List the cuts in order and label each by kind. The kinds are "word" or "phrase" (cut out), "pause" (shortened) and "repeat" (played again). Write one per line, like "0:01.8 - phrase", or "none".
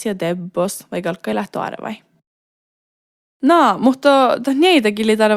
none